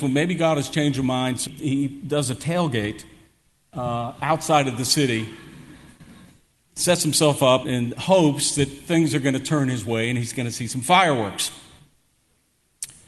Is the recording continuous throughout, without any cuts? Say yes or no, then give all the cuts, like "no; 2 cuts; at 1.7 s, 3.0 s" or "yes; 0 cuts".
no; 2 cuts; at 1.5 s, 7.6 s